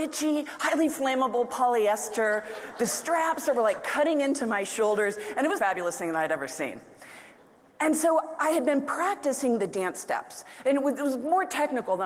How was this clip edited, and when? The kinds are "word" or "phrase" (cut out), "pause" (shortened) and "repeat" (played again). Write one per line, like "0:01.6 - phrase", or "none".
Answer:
0:05.6 - phrase